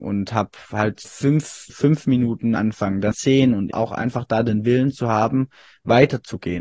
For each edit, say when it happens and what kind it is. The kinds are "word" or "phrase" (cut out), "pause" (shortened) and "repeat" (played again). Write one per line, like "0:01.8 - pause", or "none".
0:01.0 - word
0:01.7 - word
0:02.6 - word
0:03.1 - word
0:03.7 - word

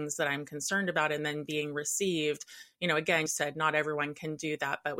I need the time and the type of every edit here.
0:03.3 - word

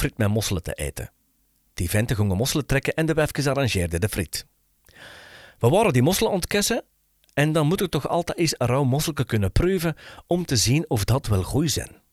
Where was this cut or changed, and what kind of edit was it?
none

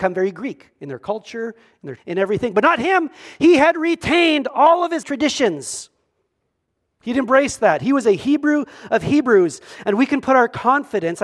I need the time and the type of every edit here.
0:02.0 - word
0:05.0 - word

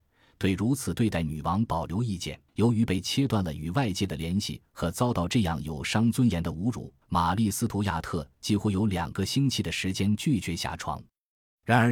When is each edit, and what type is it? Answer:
0:02.5 - pause
0:07.0 - pause

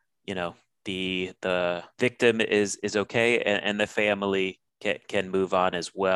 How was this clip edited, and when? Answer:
0:04.7 - pause

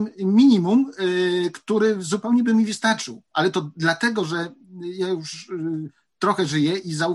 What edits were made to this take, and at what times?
none

